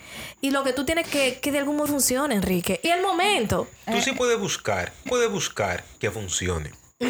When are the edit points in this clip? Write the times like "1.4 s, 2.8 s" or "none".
1.0 s, 1.9 s, 2.8 s, 3.8 s, 5.1 s